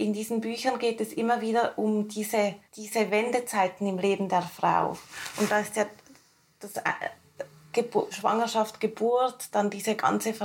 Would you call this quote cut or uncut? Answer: cut